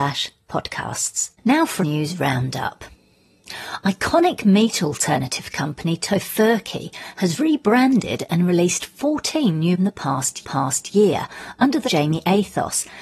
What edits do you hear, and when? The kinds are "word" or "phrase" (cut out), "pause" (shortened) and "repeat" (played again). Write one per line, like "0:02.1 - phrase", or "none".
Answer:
0:01.3 - pause
0:01.8 - phrase
0:09.8 - phrase
0:10.4 - repeat
0:11.8 - phrase